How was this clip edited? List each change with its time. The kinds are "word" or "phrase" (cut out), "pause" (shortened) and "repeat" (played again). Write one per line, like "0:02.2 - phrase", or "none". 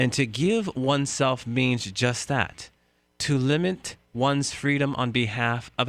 none